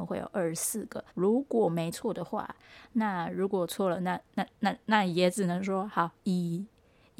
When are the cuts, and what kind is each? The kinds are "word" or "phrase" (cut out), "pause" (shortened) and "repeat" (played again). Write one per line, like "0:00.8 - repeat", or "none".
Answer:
0:01.1 - pause